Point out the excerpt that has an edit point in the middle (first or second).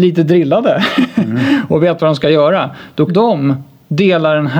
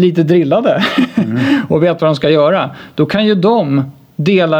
first